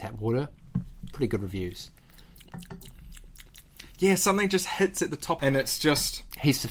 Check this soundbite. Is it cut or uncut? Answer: cut